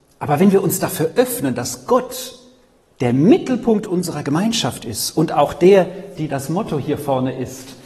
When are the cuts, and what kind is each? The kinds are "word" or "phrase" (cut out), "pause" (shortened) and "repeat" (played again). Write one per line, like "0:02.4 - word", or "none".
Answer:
none